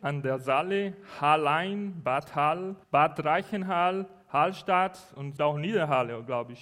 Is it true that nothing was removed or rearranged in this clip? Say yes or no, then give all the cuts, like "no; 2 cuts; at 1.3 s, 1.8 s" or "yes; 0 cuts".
no; 2 cuts; at 2.8 s, 5.4 s